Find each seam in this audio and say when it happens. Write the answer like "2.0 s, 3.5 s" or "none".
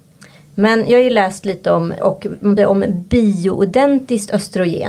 2.0 s, 2.6 s